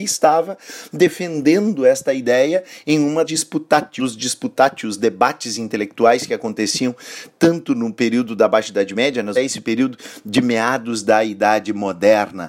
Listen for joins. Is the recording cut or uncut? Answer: cut